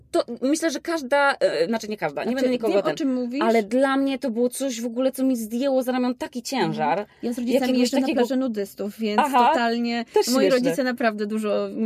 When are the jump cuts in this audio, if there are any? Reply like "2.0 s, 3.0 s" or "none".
none